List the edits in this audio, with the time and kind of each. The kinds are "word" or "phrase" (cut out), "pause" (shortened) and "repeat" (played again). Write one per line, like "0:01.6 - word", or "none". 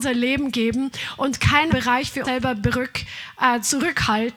0:01.7 - word
0:02.2 - word

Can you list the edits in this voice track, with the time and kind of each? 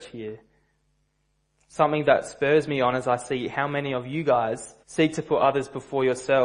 0:04.8 - pause

